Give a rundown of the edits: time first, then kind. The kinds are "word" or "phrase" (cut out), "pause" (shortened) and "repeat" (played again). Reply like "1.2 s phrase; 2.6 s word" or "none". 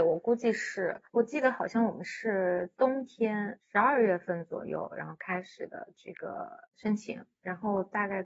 1.1 s pause; 6.7 s pause